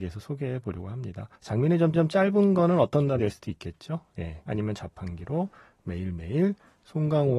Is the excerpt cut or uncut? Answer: cut